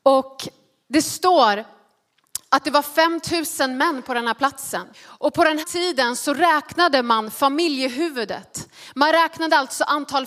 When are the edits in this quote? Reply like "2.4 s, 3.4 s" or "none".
4.9 s, 5.6 s